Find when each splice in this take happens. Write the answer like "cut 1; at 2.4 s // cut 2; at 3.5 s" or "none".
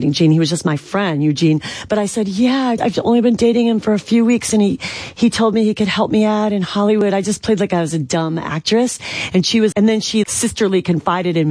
cut 1; at 2.8 s // cut 2; at 9.7 s // cut 3; at 10.2 s